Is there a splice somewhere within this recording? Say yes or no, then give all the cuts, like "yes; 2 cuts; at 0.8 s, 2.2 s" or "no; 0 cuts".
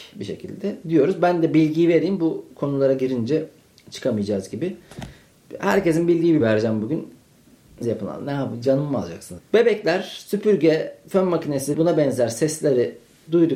yes; 4 cuts; at 6.4 s, 7.8 s, 9.4 s, 11.7 s